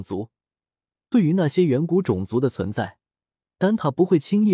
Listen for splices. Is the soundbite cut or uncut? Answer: uncut